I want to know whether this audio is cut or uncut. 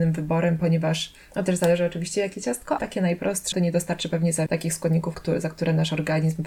cut